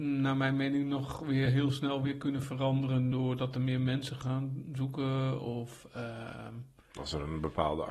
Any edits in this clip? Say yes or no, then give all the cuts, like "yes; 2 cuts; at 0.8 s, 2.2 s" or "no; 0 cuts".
no; 0 cuts